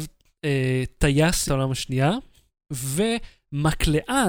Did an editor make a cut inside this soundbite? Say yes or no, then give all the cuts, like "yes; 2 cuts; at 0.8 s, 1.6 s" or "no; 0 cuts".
yes; 1 cut; at 1.5 s